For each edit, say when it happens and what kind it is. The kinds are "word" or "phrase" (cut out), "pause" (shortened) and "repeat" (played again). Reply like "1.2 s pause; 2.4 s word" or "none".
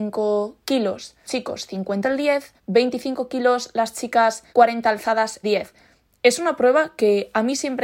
1.2 s word; 2.0 s word; 2.6 s pause; 4.5 s pause; 5.4 s word